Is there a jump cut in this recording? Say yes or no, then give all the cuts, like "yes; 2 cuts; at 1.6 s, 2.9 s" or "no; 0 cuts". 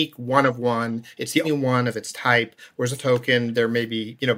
yes; 2 cuts; at 1.4 s, 3.0 s